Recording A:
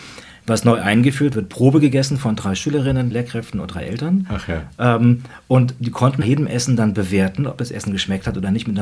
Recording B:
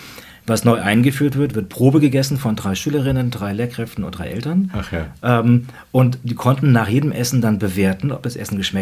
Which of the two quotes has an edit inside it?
A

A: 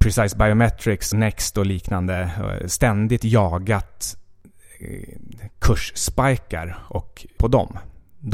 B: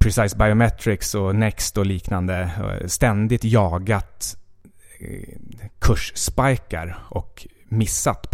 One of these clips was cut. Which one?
A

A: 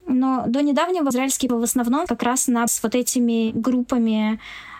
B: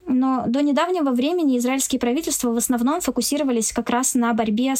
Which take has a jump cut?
A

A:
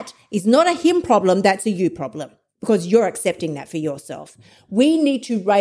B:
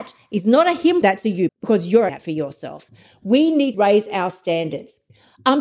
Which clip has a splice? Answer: B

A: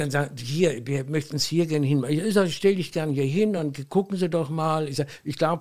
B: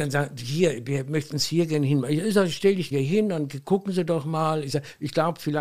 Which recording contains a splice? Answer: B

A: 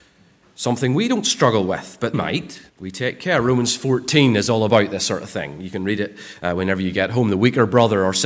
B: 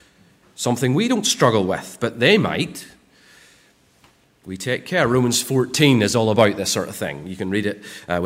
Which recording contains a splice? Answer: A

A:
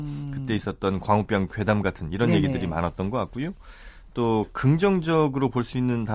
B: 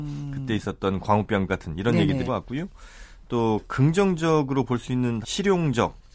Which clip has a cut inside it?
B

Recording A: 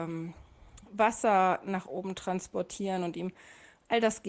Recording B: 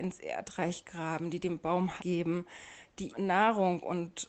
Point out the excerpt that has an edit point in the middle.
B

